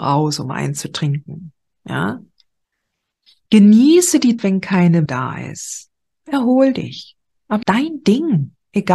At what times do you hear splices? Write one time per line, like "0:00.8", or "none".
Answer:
0:04.4
0:05.1
0:07.6